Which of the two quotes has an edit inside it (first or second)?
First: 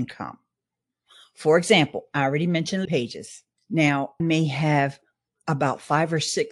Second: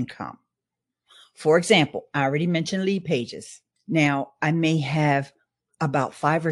first